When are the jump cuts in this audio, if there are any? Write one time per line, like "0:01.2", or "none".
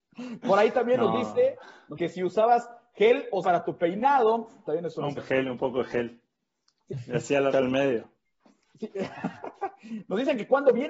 0:02.0
0:03.4
0:05.2
0:07.5